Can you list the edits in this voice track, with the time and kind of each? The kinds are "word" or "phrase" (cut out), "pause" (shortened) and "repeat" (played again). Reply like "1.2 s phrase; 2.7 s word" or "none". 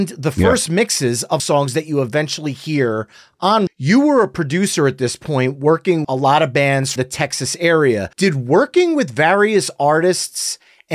1.4 s phrase; 3.7 s word; 6.0 s word; 7.0 s phrase; 8.1 s pause